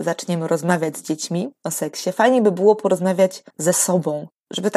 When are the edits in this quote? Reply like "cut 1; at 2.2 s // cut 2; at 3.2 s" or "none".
cut 1; at 3.5 s